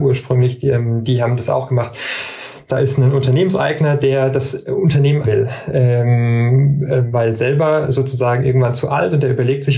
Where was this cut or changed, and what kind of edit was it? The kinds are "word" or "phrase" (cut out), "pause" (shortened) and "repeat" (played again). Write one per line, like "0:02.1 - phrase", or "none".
0:05.2 - word
0:07.1 - word